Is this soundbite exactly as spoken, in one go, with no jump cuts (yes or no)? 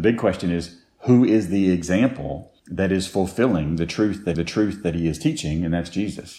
no